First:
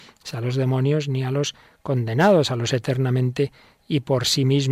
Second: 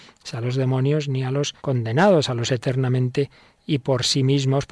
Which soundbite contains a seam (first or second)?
second